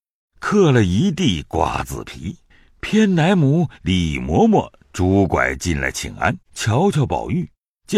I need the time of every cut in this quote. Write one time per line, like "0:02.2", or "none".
0:06.4